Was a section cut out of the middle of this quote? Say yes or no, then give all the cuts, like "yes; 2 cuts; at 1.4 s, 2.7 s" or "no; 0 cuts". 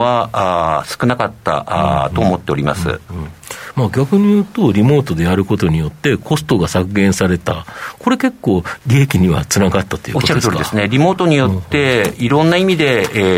no; 0 cuts